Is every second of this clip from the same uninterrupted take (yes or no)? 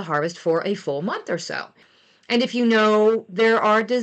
yes